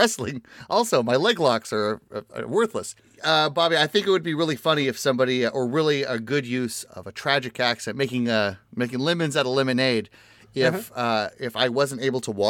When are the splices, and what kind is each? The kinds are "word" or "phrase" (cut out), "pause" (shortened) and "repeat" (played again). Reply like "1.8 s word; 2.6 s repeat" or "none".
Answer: none